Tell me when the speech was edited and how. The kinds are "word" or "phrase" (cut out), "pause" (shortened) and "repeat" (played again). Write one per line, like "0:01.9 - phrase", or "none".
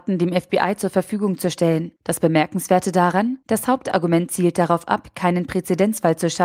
0:02.0 - pause
0:03.4 - pause